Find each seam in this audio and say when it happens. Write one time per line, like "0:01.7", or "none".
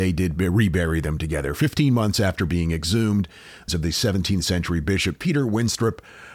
0:03.7